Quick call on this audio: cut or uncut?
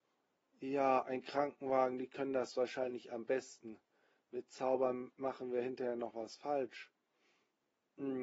uncut